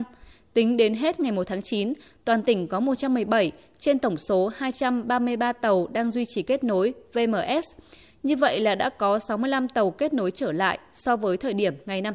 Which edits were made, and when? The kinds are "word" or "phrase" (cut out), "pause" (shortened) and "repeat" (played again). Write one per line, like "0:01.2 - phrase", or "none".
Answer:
none